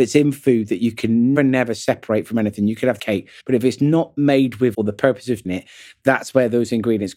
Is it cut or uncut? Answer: cut